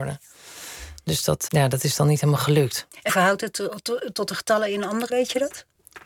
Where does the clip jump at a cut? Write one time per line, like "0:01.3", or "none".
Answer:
0:01.5
0:03.1
0:05.1